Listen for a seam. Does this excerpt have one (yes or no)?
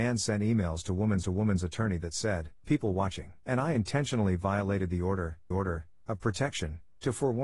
yes